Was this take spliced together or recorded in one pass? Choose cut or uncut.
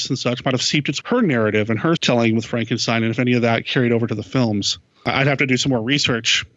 cut